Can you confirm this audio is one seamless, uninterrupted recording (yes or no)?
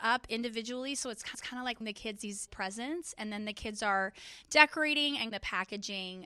no